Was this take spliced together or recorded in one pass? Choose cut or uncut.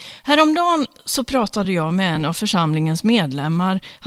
uncut